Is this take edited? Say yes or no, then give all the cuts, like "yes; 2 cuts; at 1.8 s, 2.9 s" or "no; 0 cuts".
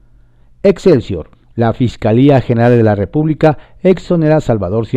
yes; 1 cut; at 1.3 s